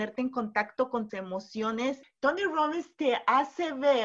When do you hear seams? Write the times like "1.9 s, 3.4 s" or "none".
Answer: 1.1 s